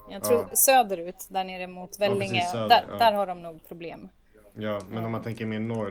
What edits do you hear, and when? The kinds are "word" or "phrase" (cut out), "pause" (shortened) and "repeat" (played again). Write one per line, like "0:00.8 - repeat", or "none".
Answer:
none